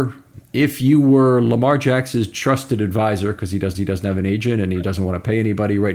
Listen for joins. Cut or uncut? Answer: cut